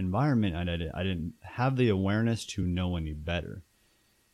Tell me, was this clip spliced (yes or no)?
no